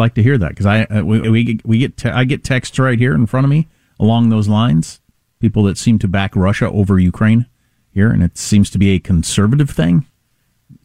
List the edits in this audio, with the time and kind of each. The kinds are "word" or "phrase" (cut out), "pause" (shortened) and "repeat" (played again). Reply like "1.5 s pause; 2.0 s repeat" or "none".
1.2 s word